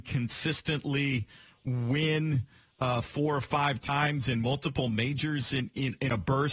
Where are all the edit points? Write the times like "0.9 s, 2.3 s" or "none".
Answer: none

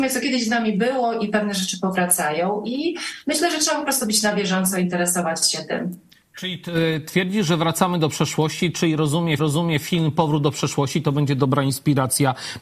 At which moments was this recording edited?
9.4 s

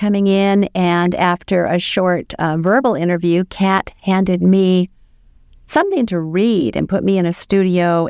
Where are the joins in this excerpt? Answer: none

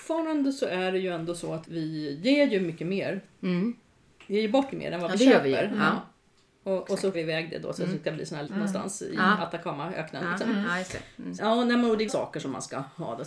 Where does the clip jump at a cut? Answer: 1.6 s, 4.7 s, 7.1 s, 8.5 s, 11.4 s, 12.1 s

